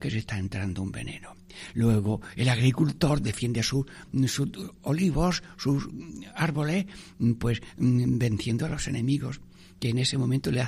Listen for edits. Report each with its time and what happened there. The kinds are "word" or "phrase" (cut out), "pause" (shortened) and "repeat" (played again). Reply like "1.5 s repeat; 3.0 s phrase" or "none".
none